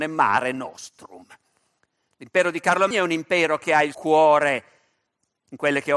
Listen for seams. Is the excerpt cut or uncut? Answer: cut